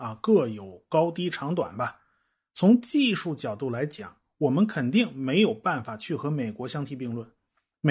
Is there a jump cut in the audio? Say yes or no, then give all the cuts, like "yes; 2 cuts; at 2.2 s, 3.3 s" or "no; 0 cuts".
no; 0 cuts